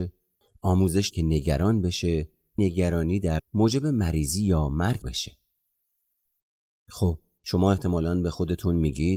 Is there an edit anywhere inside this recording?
yes; 4 cuts; at 1.1 s, 2.6 s, 3.4 s, 5.0 s

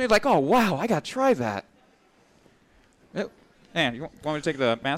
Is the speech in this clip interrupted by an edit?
no; 0 cuts

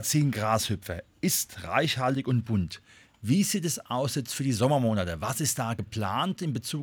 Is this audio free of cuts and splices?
yes; 0 cuts

